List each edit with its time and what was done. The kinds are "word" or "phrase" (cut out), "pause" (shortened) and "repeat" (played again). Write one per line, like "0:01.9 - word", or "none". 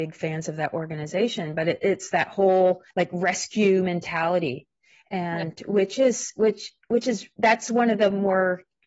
0:02.9 - pause